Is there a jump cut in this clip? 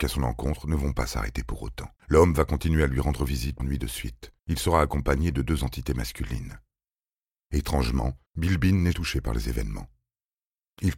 yes; 6 cuts; at 2.0 s, 3.6 s, 4.4 s, 5.6 s, 8.3 s, 8.9 s

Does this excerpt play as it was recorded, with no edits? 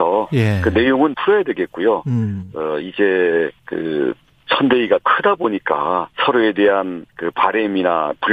no; 5 cuts; at 1.1 s, 3.6 s, 5.0 s, 6.1 s, 7.1 s

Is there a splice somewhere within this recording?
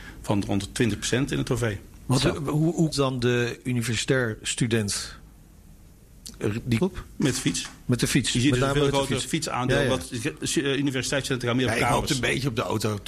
yes; 2 cuts; at 2.9 s, 6.8 s

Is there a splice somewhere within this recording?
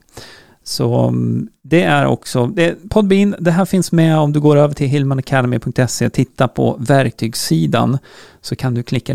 no; 0 cuts

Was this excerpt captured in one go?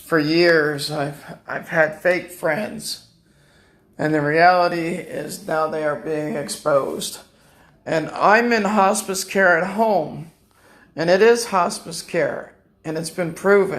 yes; 0 cuts

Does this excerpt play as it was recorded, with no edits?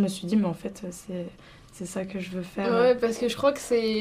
yes; 0 cuts

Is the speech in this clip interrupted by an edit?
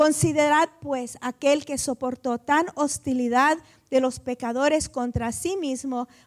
no; 0 cuts

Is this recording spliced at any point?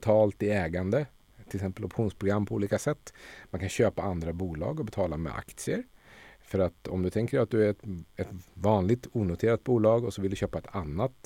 no; 0 cuts

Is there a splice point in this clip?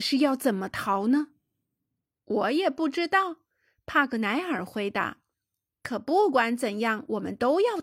no; 0 cuts

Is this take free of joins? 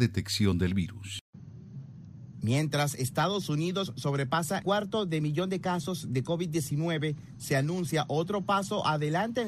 no; 1 cut; at 4.6 s

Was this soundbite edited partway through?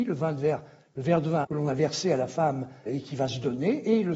yes; 2 cuts; at 1.4 s, 2.9 s

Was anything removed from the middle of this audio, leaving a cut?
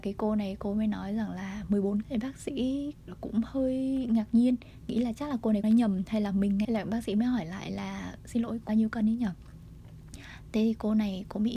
yes; 5 cuts; at 2.0 s, 3.1 s, 5.6 s, 6.6 s, 8.7 s

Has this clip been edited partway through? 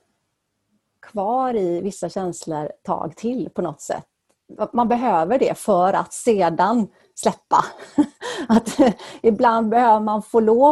yes; 1 cut; at 2.8 s

